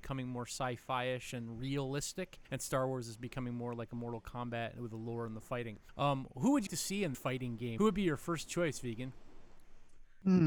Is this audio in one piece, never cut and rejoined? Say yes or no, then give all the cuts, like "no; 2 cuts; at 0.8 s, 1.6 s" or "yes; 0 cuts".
no; 4 cuts; at 2.4 s, 5.9 s, 6.7 s, 7.1 s